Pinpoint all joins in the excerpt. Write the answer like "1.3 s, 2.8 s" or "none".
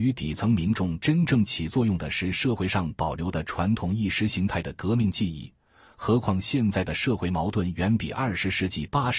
none